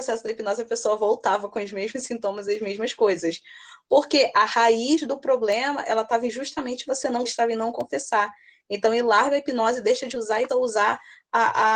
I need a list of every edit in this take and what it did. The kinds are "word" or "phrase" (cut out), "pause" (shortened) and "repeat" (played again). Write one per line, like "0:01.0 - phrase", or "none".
0:07.2 - word
0:10.5 - word